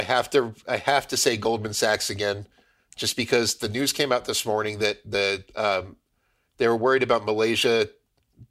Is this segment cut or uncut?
uncut